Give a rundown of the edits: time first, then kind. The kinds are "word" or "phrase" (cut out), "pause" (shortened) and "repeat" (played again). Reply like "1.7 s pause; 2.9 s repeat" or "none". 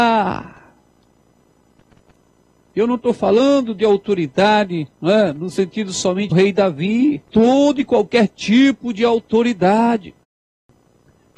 4.9 s pause; 6.3 s phrase; 7.3 s pause

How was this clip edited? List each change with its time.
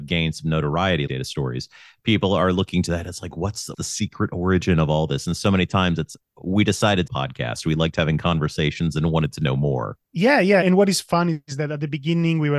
1.1 s word; 3.7 s word; 7.1 s phrase; 10.0 s pause; 10.6 s word

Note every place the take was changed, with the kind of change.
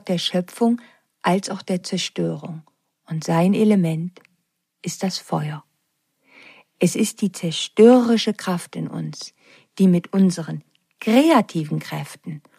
none

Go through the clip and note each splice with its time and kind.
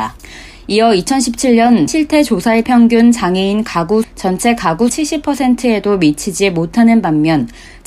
1.9 s word; 2.6 s phrase; 4.0 s word; 4.9 s word

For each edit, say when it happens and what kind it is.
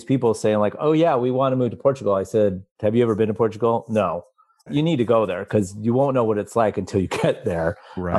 4.7 s word

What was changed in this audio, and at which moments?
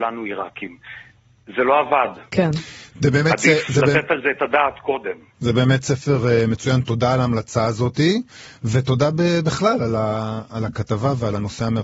none

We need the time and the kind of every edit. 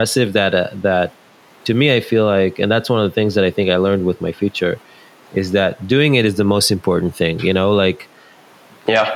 none

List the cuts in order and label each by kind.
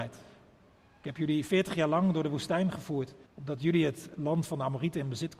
3.3 s pause

